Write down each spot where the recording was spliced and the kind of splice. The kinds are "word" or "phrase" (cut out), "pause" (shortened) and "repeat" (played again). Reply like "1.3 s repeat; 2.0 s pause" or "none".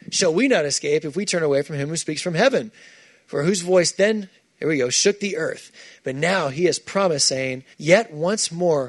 7.7 s pause